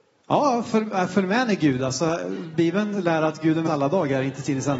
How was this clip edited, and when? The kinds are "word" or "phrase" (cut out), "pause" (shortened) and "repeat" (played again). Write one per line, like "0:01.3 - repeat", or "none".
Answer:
0:03.7 - word

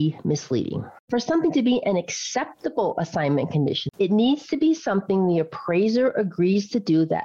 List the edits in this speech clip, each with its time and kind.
0:01.0 - pause
0:03.9 - word

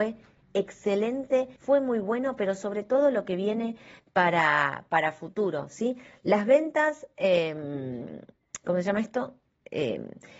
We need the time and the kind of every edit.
0:01.6 - pause
0:08.6 - word

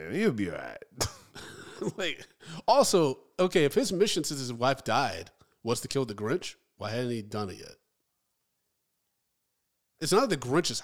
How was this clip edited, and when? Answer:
none

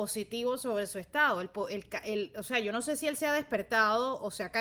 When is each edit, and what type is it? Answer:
none

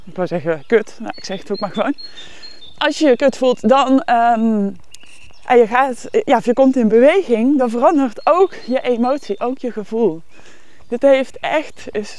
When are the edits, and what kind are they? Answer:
none

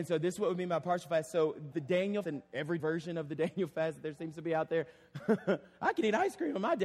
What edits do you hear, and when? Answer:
0:01.7 - word
0:02.2 - word
0:02.8 - word

